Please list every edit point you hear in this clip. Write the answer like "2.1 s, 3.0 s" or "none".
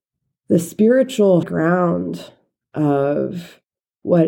1.4 s